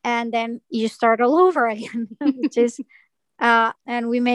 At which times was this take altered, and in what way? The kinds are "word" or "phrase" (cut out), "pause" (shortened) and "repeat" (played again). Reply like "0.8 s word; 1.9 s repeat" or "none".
3.0 s pause